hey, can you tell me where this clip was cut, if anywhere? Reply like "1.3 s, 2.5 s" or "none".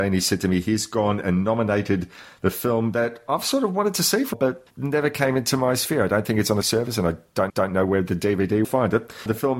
4.3 s, 4.7 s, 6.6 s, 7.5 s, 8.6 s